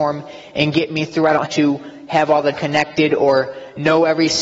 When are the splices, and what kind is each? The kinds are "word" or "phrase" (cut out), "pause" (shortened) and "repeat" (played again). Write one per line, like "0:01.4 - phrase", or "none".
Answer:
0:01.5 - word
0:02.5 - word